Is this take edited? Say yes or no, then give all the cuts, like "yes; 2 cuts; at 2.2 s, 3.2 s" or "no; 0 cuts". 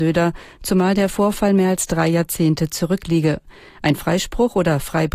no; 0 cuts